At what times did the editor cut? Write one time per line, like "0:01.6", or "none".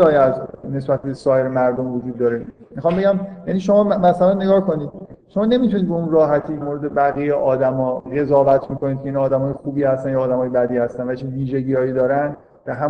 0:06.6